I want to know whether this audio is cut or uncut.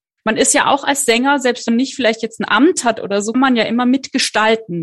cut